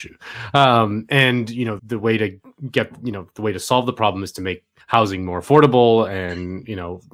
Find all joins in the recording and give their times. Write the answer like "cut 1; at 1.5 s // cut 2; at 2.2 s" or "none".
cut 1; at 1.8 s // cut 2; at 4.8 s